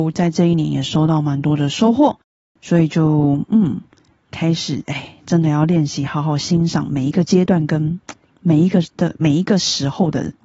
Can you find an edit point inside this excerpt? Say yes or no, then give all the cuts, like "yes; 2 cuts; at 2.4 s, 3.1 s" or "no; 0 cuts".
no; 0 cuts